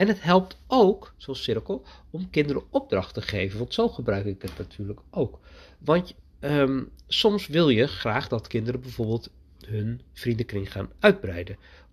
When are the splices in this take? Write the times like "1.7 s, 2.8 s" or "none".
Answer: none